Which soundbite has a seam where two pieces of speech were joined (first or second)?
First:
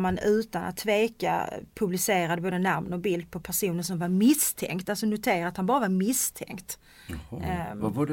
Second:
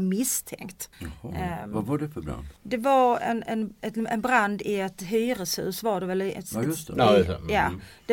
second